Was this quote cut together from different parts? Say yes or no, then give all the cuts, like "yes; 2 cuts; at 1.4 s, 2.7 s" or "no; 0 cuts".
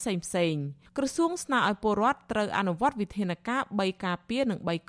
no; 0 cuts